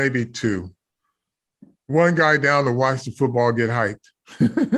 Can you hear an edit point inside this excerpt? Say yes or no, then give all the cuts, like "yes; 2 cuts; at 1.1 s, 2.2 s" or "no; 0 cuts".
no; 0 cuts